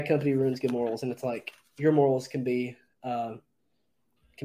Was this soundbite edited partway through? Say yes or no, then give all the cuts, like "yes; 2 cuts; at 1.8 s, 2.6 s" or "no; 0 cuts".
no; 0 cuts